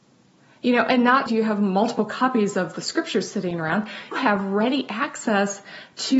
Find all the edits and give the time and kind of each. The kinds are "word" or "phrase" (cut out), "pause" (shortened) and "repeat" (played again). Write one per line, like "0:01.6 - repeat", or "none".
0:01.3 - word
0:04.1 - word